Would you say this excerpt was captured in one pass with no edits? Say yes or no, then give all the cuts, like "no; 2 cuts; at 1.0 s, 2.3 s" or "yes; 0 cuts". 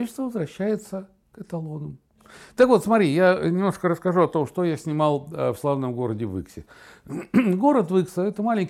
yes; 0 cuts